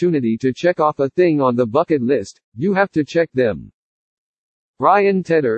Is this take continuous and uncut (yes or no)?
yes